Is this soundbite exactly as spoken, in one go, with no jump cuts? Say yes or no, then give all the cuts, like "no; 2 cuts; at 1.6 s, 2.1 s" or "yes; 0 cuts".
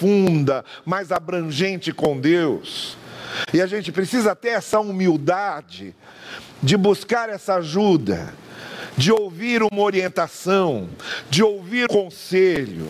no; 1 cut; at 11.9 s